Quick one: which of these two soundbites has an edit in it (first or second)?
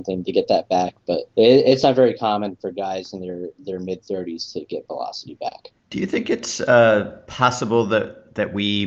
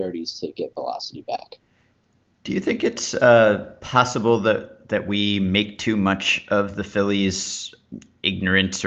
first